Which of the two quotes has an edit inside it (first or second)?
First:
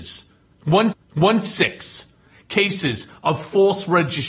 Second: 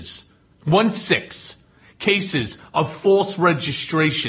first